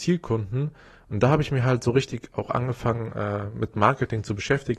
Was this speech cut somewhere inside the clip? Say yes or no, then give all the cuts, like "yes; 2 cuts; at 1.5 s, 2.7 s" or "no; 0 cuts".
no; 0 cuts